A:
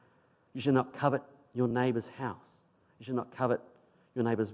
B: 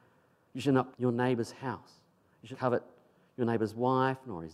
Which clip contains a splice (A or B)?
B